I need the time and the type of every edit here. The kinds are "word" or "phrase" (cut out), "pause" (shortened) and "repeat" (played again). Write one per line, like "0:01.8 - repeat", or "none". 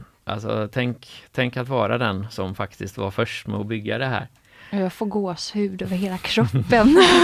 none